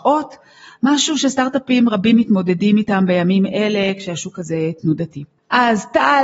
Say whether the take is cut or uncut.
uncut